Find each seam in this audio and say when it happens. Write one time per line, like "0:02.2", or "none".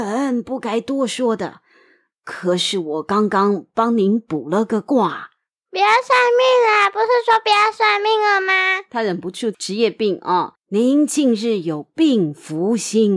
0:10.6